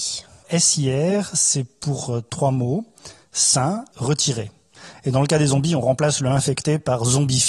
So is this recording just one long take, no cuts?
no; 2 cuts; at 2.3 s, 3.9 s

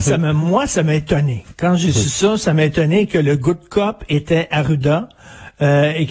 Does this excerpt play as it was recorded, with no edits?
yes; 0 cuts

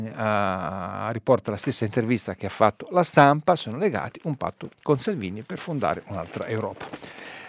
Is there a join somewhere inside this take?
yes; 1 cut; at 4.7 s

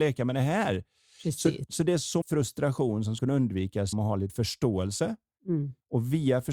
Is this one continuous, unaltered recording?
no; 4 cuts; at 2.2 s, 3.2 s, 3.9 s, 4.3 s

